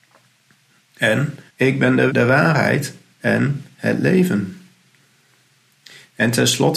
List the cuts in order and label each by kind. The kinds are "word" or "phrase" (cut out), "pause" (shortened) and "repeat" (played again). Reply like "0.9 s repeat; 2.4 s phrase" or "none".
1.5 s pause; 2.1 s word